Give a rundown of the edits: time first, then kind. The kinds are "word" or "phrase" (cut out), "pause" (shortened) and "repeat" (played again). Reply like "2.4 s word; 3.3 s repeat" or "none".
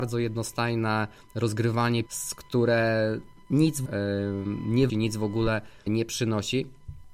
2.1 s word; 3.9 s word; 4.9 s word; 5.9 s word